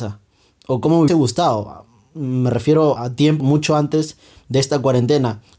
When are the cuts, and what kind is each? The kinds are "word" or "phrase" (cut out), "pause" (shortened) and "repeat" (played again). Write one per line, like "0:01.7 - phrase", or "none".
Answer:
0:01.1 - word
0:03.0 - word
0:03.4 - word